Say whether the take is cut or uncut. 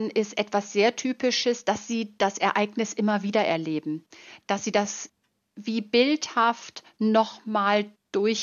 uncut